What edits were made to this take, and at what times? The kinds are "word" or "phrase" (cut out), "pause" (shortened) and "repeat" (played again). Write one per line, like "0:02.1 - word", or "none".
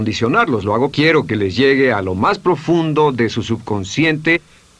0:00.9 - word